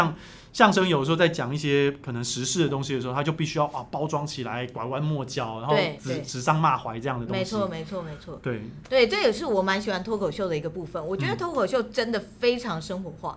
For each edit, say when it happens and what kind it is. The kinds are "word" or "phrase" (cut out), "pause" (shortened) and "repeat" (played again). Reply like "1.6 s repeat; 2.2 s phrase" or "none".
none